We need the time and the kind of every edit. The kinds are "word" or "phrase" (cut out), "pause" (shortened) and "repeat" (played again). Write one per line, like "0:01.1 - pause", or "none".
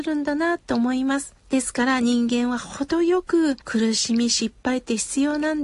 0:01.4 - pause
0:03.6 - pause